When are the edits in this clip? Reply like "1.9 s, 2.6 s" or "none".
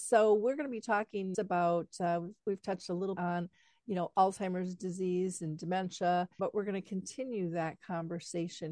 1.3 s, 3.2 s, 6.4 s